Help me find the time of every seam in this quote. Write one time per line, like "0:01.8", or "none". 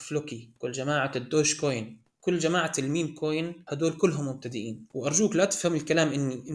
none